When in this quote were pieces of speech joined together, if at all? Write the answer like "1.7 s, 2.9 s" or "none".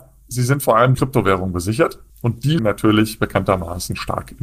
0.9 s, 2.1 s, 2.6 s